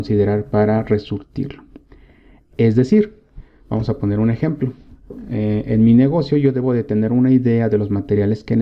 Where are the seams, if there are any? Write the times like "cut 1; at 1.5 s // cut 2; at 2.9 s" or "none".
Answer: none